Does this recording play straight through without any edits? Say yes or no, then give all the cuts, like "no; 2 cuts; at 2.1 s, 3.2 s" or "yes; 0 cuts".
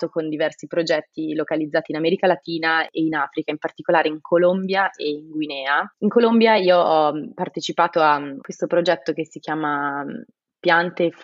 yes; 0 cuts